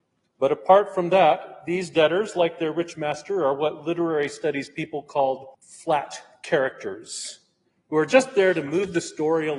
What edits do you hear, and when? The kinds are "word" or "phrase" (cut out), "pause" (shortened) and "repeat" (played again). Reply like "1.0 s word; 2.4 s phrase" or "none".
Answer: 5.5 s pause; 7.7 s pause

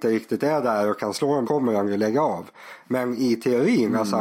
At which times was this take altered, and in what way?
1.4 s phrase

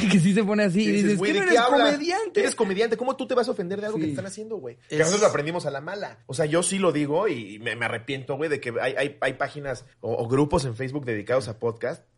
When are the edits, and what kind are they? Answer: 4.8 s pause; 6.2 s pause; 9.9 s pause

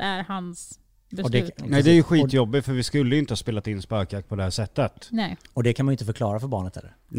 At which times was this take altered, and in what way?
none

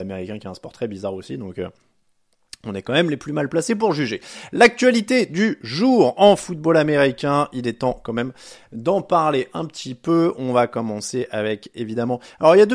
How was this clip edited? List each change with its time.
none

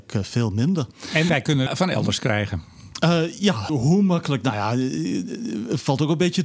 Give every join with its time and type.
1.3 s word; 1.7 s phrase; 3.7 s word

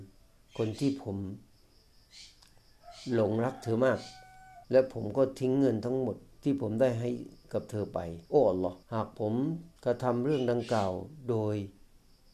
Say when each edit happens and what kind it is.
4.6 s pause; 6.3 s pause; 8.3 s pause; 8.8 s pause; 9.8 s pause

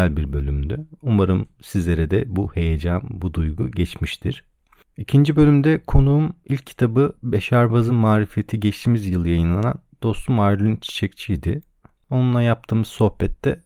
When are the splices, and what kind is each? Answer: none

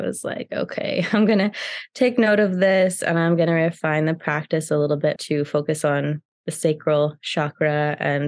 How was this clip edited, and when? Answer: 5.2 s word

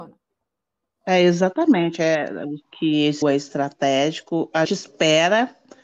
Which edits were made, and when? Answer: 2.6 s phrase; 3.2 s word; 4.6 s word

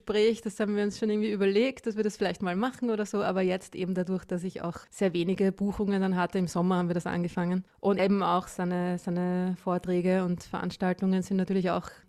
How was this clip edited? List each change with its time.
4.8 s pause; 8.0 s word

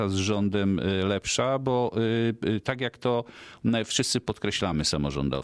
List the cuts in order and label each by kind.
none

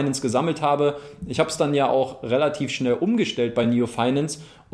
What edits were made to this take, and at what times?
none

